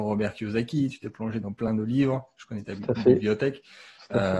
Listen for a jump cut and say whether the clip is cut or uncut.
uncut